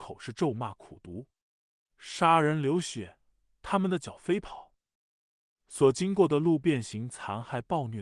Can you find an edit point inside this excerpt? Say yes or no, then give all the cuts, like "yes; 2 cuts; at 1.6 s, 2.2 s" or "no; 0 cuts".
no; 0 cuts